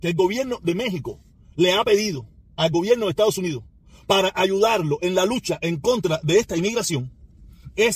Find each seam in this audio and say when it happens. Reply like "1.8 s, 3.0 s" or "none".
none